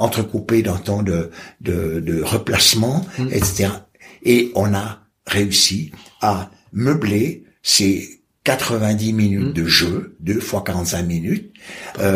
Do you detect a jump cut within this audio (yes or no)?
no